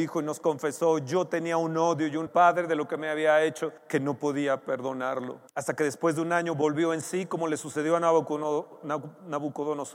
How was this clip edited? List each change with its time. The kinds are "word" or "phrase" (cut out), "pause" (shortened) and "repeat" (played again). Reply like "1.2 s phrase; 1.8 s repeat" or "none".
2.3 s phrase; 3.8 s pause; 5.5 s pause